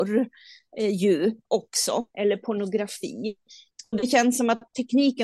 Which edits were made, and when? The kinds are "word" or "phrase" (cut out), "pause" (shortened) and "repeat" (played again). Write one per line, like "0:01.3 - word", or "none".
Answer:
0:02.1 - pause